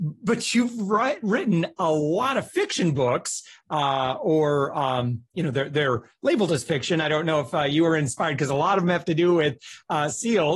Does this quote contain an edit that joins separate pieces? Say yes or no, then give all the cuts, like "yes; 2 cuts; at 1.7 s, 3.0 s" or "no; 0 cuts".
no; 0 cuts